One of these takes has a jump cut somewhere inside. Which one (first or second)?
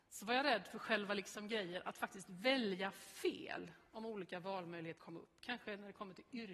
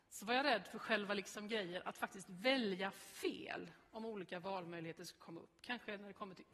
first